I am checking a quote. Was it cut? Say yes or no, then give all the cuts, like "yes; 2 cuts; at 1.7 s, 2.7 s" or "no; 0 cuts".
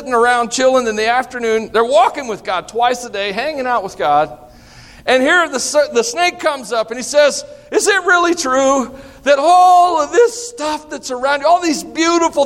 no; 0 cuts